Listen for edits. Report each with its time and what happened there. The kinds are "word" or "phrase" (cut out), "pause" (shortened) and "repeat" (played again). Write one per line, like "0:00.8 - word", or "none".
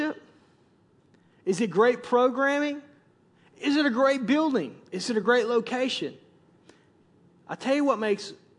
none